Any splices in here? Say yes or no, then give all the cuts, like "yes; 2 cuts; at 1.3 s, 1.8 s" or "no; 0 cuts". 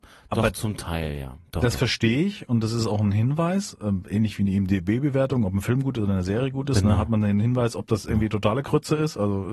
no; 0 cuts